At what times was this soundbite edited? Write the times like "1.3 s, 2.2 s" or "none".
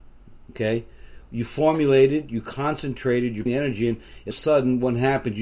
3.5 s, 4.3 s